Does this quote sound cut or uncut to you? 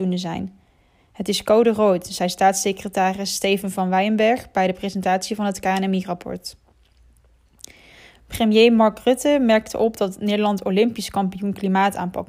uncut